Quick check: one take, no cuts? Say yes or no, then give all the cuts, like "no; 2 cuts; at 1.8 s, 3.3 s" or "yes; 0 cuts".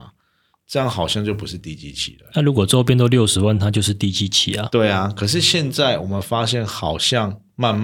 yes; 0 cuts